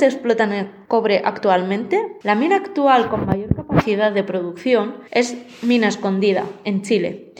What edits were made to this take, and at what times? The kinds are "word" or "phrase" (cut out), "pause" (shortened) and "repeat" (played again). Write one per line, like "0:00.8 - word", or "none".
0:02.2 - pause
0:05.1 - pause

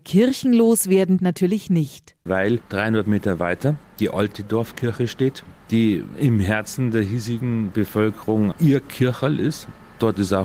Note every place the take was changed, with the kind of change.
0:01.2 - phrase
0:08.5 - word

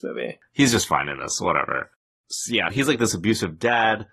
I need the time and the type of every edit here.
0:02.7 - word

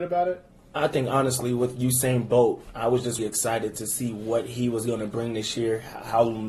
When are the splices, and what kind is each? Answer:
0:03.2 - word

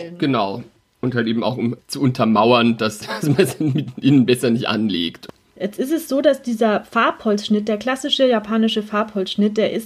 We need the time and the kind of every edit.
none

